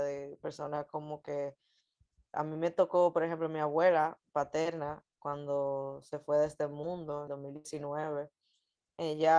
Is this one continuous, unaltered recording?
no; 2 cuts; at 2.3 s, 7.3 s

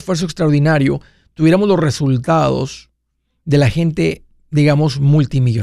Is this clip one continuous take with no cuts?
yes; 0 cuts

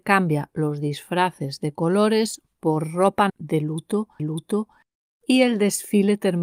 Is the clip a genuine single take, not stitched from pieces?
no; 2 cuts; at 3.3 s, 4.2 s

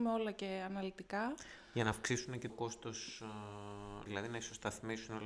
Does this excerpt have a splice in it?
yes; 2 cuts; at 2.5 s, 4.1 s

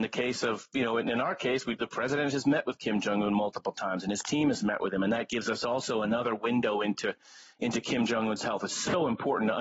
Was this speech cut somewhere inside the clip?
no; 0 cuts

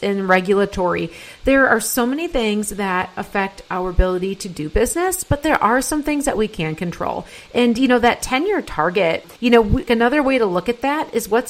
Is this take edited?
yes; 2 cuts; at 9.4 s, 9.9 s

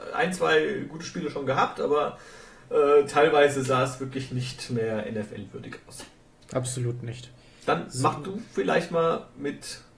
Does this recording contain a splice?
no; 0 cuts

